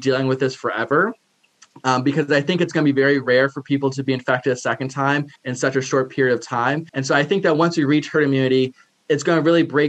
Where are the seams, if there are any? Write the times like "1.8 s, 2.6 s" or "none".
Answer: 5.4 s, 6.9 s